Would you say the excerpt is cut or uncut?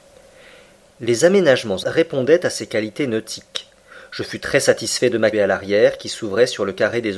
cut